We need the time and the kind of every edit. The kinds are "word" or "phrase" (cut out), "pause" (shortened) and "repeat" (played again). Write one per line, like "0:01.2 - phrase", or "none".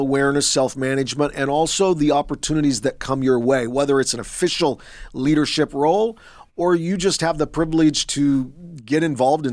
none